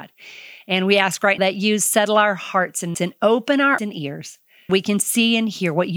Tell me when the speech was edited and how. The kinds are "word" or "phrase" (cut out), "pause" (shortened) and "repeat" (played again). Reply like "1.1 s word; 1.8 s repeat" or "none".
1.4 s word; 2.9 s word; 3.8 s word; 4.7 s word